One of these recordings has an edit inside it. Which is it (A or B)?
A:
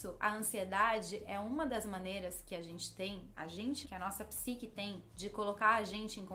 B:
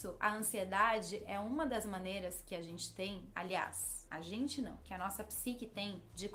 A